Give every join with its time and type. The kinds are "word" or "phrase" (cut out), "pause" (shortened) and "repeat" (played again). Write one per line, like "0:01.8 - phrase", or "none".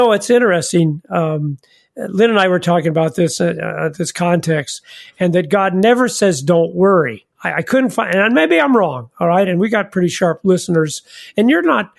0:07.3 - pause

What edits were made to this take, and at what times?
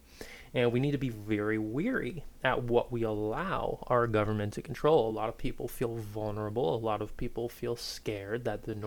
none

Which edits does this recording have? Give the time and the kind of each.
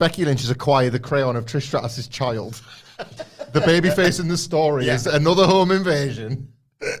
none

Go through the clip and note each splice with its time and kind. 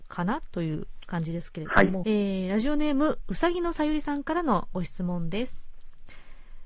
0:02.0 - phrase

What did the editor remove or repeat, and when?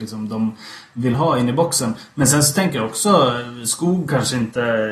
none

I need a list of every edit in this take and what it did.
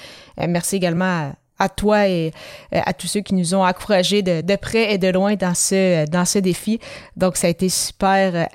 none

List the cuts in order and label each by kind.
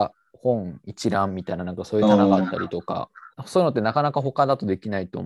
0:03.3 - pause

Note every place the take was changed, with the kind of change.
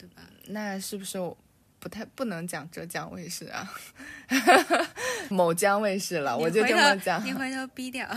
0:05.3 - word

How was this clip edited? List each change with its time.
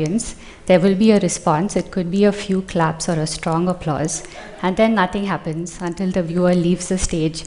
none

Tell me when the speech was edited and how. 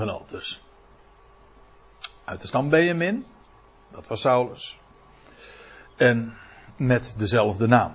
none

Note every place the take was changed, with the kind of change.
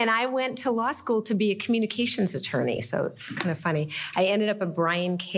none

